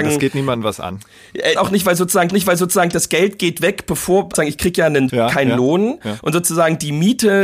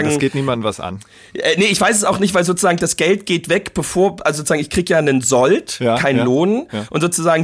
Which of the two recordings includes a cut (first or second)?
first